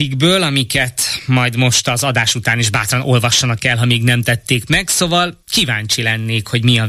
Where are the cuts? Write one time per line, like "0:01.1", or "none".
0:05.4